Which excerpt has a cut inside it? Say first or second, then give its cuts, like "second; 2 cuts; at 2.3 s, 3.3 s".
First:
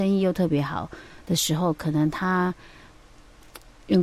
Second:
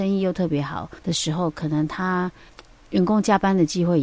second; 2 cuts; at 1.0 s, 2.5 s